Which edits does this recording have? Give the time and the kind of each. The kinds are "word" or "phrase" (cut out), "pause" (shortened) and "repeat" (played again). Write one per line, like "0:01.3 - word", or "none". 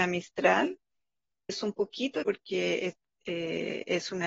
0:01.5 - word
0:02.2 - word

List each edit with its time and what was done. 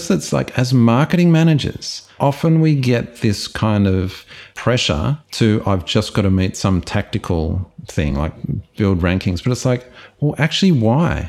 none

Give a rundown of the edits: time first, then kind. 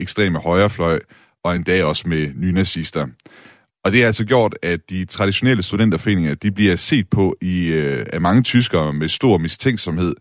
none

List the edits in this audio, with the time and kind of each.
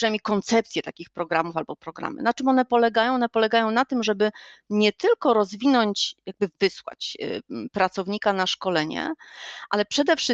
0:06.5 - word

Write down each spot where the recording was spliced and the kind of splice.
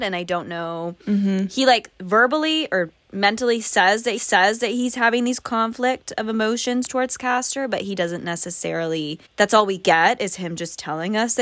0:04.2 - repeat
0:09.3 - pause

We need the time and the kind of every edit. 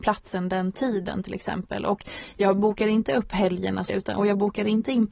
0:03.9 - word

